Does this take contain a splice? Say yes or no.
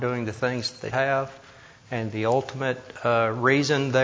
yes